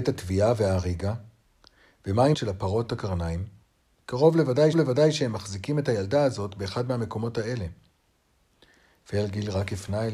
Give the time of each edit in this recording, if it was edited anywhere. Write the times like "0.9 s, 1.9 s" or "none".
2.3 s, 2.9 s, 4.7 s